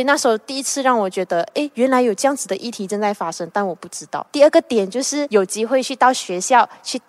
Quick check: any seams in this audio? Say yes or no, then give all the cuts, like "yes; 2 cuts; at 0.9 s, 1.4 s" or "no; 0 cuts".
no; 0 cuts